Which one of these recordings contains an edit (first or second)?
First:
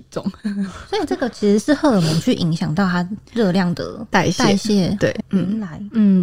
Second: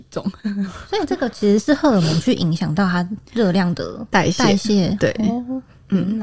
first